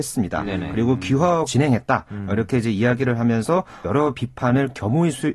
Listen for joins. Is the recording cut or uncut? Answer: cut